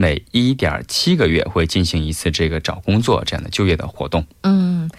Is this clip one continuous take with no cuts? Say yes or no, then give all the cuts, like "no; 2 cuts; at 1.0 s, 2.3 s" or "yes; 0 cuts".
yes; 0 cuts